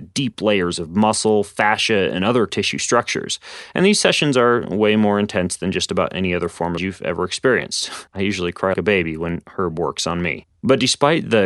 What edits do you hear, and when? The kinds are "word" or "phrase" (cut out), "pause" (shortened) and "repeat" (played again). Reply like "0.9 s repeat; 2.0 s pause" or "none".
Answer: 2.5 s word; 6.8 s phrase; 8.1 s pause; 8.7 s word; 10.6 s pause

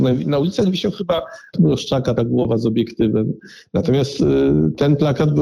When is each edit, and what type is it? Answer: 1.5 s word; 2.2 s word

